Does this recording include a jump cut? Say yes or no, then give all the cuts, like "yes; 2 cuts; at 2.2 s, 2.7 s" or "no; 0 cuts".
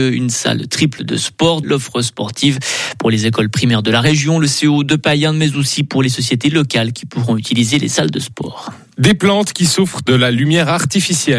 yes; 1 cut; at 1.6 s